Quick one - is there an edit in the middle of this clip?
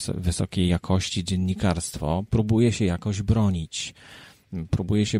no; 0 cuts

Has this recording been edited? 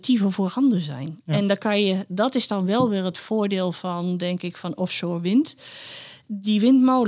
no; 0 cuts

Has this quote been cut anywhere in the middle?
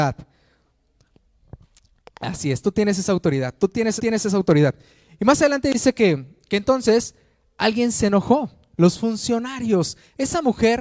yes; 1 cut; at 4.0 s

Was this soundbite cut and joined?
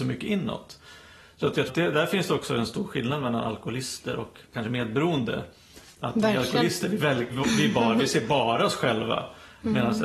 yes; 3 cuts; at 1.7 s, 4.4 s, 7.3 s

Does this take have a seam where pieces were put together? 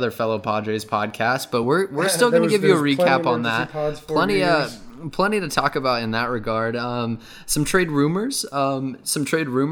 no; 0 cuts

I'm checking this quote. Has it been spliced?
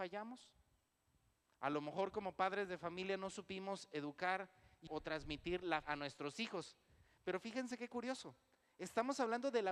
yes; 2 cuts; at 4.9 s, 5.8 s

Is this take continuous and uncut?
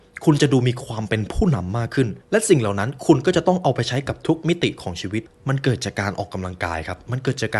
no; 2 cuts; at 2.2 s, 5.3 s

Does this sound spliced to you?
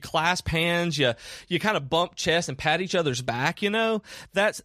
no; 0 cuts

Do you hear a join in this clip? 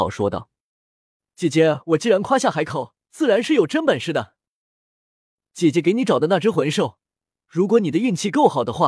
yes; 1 cut; at 3.0 s

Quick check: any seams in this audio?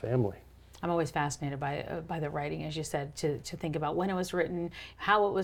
no; 0 cuts

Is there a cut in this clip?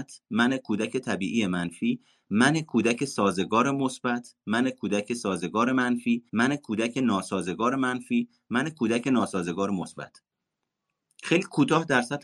yes; 1 cut; at 6.3 s

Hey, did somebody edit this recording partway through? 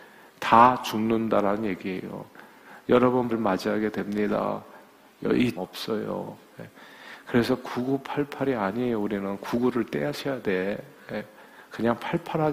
yes; 2 cuts; at 3.3 s, 5.6 s

